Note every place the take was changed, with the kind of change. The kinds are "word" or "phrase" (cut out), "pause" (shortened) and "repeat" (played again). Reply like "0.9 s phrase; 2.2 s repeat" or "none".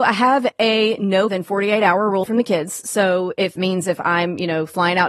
1.3 s word; 2.2 s word; 3.6 s word